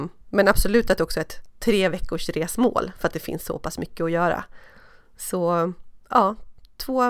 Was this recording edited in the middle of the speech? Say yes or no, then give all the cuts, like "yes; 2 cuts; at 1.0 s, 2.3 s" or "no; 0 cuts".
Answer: no; 0 cuts